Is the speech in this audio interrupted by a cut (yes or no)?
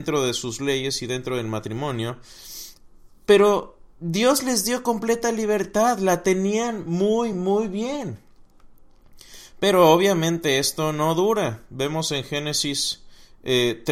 no